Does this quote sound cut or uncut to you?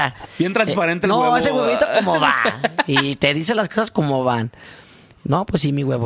uncut